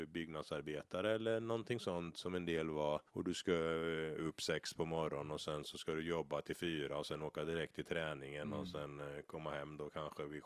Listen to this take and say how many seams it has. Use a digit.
1